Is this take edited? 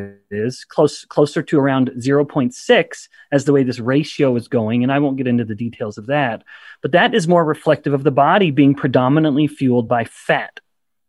no; 0 cuts

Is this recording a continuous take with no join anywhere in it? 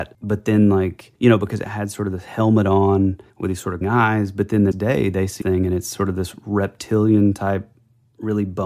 no; 5 cuts; at 1.2 s, 3.3 s, 3.8 s, 4.7 s, 5.4 s

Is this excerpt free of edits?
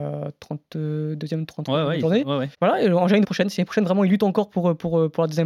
no; 2 cuts; at 2.5 s, 3.2 s

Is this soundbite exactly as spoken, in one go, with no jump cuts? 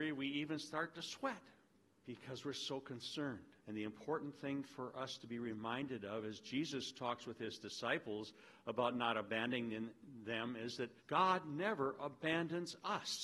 no; 3 cuts; at 1.7 s, 3.6 s, 11.0 s

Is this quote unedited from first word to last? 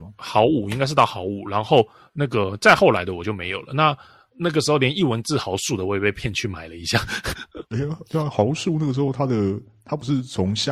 no; 1 cut; at 7.7 s

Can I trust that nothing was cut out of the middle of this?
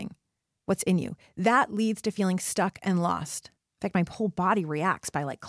no; 1 cut; at 3.6 s

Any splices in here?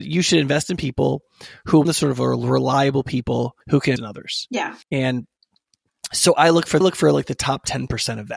yes; 5 cuts; at 1.8 s, 3.6 s, 4.0 s, 4.8 s, 6.8 s

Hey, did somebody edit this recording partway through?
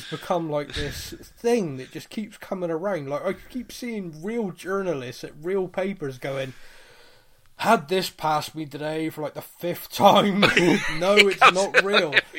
no; 0 cuts

